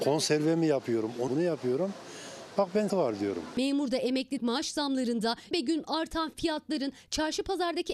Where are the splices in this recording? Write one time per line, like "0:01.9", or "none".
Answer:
0:01.3
0:02.9
0:04.4
0:05.5